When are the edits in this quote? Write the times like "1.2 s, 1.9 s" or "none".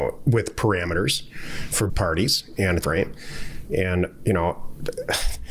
1.9 s, 2.8 s